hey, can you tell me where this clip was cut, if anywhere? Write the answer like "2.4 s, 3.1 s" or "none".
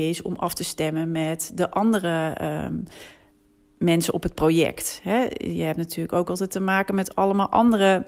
none